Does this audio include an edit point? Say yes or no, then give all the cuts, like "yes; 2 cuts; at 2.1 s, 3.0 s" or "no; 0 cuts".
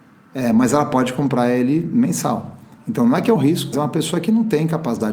yes; 2 cuts; at 3.4 s, 3.7 s